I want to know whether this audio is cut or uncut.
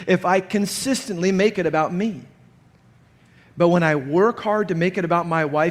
uncut